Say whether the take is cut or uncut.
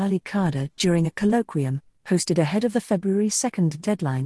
uncut